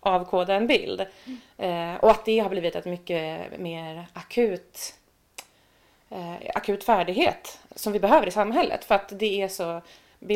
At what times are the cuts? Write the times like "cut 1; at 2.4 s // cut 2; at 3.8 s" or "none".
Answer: none